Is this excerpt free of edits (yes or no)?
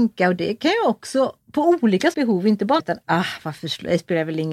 no